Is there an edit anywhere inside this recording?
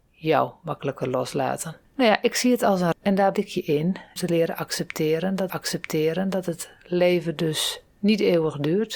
yes; 6 cuts; at 1.8 s, 2.9 s, 3.3 s, 4.2 s, 5.5 s, 7.9 s

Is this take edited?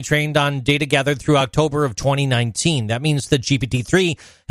no; 0 cuts

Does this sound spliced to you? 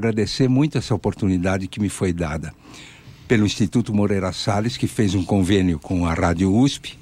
no; 0 cuts

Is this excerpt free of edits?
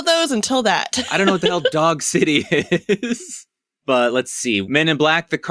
yes; 0 cuts

